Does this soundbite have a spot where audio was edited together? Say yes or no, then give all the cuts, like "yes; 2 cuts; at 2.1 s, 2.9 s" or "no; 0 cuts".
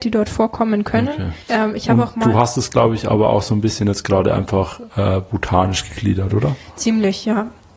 yes; 1 cut; at 1.4 s